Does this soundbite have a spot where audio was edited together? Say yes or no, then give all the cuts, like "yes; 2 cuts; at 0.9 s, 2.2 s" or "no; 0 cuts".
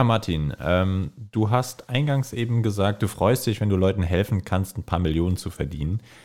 no; 0 cuts